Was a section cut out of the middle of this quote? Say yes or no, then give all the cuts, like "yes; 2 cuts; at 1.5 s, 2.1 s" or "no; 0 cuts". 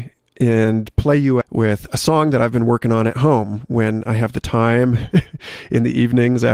yes; 1 cut; at 1.4 s